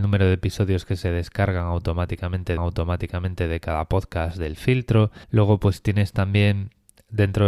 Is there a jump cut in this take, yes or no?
yes